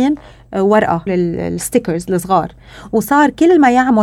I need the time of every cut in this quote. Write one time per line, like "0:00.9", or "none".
0:01.1